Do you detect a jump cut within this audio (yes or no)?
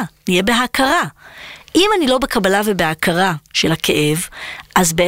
no